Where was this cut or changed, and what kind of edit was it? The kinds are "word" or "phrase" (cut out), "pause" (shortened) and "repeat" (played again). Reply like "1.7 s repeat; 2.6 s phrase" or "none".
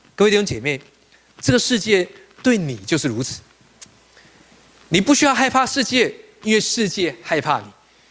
none